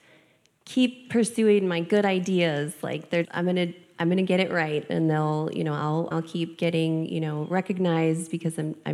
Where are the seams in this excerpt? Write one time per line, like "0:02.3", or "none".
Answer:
0:03.2
0:06.1